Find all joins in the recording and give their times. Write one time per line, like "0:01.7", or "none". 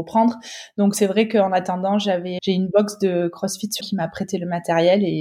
0:02.4
0:03.8